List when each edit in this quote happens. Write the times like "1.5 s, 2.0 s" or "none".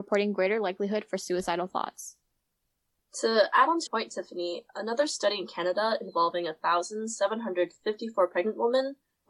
3.9 s

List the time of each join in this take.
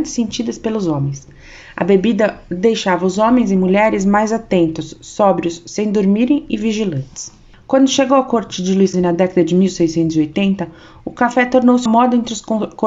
8.9 s, 11.9 s

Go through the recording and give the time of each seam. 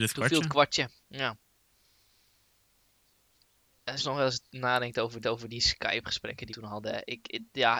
1.0 s, 4.0 s, 5.2 s, 6.5 s

